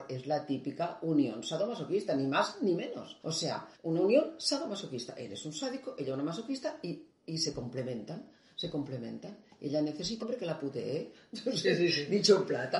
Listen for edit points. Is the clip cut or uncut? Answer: cut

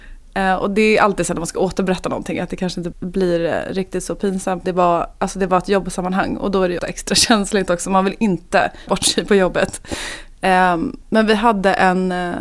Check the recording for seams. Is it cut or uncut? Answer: cut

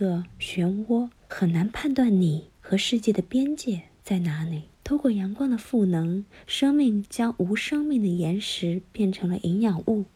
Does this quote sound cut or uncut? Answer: cut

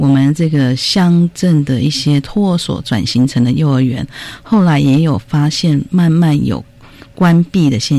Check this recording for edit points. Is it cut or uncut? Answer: uncut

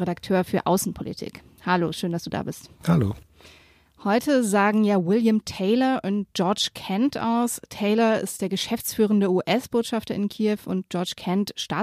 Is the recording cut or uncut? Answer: uncut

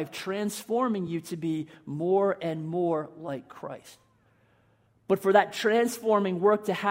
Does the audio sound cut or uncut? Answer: uncut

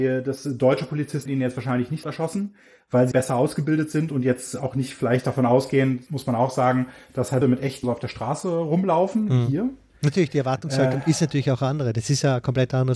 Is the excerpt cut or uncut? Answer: cut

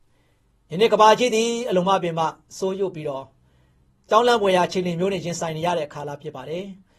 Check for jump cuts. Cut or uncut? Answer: uncut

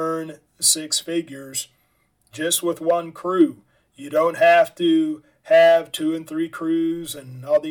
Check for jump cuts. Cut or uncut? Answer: uncut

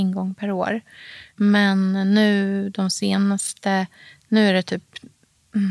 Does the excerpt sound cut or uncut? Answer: uncut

